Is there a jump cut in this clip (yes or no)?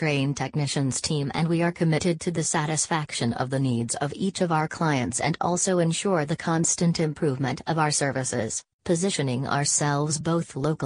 no